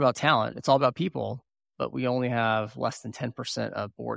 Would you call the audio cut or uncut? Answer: uncut